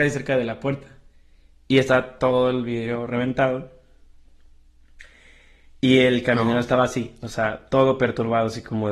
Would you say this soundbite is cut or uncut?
uncut